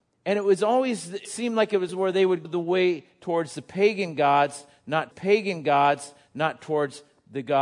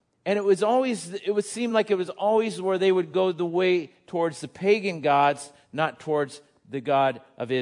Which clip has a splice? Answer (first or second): first